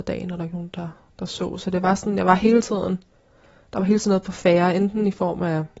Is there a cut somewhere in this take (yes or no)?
no